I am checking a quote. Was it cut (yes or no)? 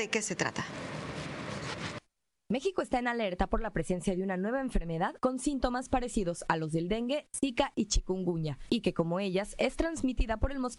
yes